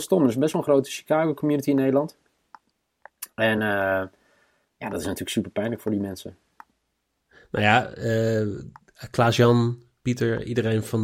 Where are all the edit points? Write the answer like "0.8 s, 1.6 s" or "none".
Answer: none